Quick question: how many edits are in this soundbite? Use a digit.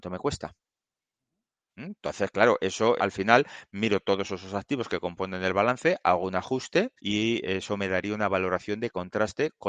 2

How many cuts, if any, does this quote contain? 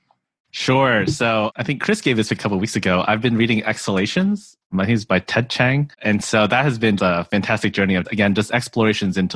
4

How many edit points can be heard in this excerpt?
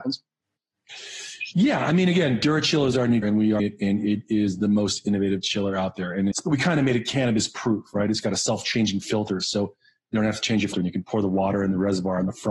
4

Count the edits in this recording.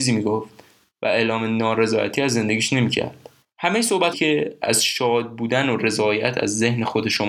2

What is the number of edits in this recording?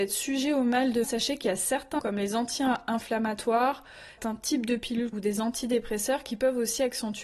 4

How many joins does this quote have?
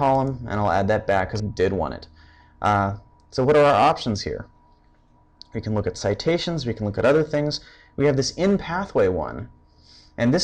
1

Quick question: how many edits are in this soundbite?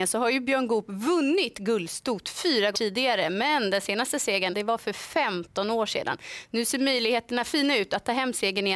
2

